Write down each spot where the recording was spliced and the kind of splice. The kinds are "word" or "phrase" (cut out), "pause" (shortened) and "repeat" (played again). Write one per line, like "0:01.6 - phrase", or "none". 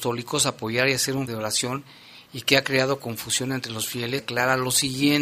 0:01.3 - word
0:04.2 - word